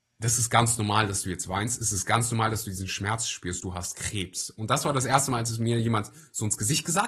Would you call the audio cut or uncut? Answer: uncut